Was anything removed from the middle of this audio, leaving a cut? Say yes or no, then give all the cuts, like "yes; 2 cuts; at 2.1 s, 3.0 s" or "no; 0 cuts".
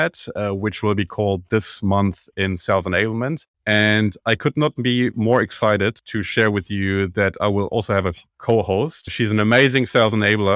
yes; 1 cut; at 3.5 s